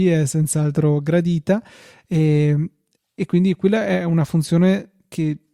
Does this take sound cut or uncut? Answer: uncut